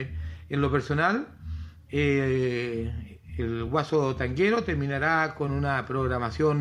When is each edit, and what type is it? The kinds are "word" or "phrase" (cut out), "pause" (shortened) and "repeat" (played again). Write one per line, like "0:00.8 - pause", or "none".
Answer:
none